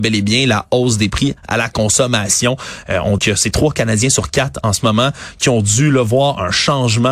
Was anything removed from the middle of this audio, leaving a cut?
yes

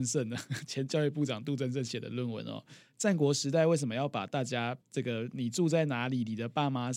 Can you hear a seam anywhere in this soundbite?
yes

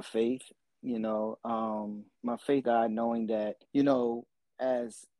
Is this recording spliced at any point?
yes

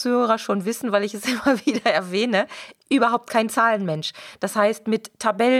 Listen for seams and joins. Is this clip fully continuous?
yes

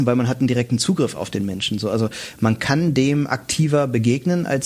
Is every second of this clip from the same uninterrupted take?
yes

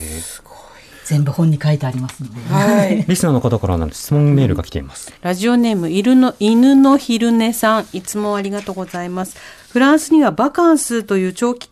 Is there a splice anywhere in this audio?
yes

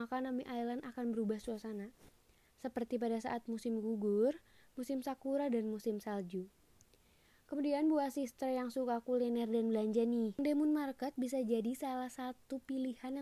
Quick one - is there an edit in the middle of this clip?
no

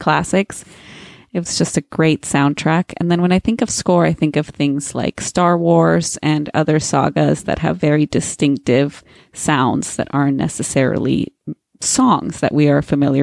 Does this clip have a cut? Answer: no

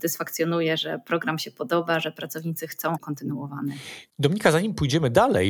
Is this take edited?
yes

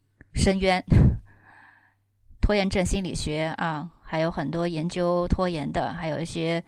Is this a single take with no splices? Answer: yes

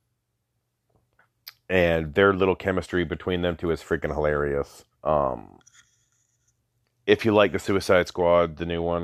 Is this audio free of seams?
no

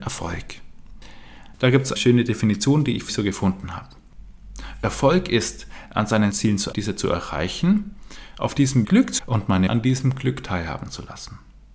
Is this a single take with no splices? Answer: no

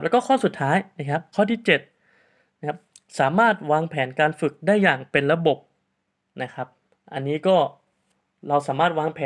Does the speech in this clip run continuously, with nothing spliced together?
yes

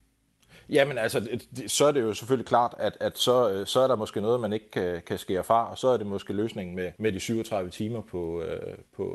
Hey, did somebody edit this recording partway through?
yes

